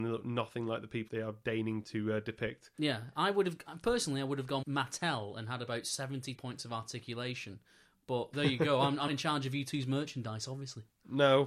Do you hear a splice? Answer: yes; 6 cuts; at 1.1 s, 1.8 s, 4.6 s, 6.4 s, 8.3 s, 9.1 s

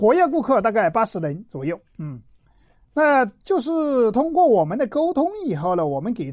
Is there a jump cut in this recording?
no; 0 cuts

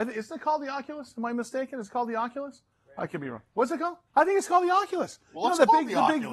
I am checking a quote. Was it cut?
yes; 1 cut; at 4.1 s

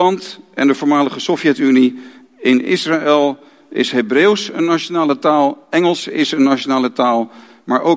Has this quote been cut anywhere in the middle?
no; 0 cuts

